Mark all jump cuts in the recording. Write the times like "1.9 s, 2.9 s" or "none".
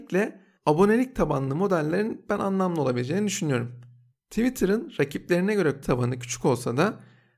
5.8 s

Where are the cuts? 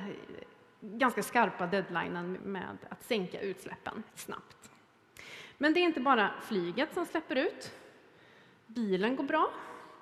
2.4 s, 4.1 s

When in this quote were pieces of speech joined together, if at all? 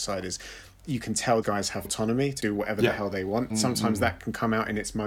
1.4 s, 1.8 s, 2.4 s, 3.5 s

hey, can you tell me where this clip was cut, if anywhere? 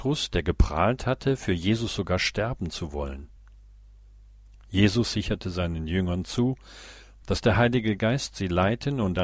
none

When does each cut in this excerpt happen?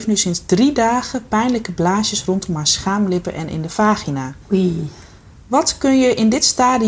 4.4 s

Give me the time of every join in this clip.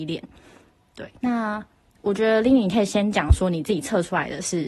1.2 s

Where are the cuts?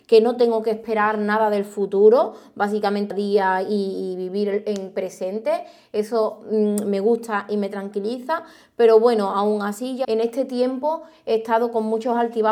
3.1 s, 10.0 s

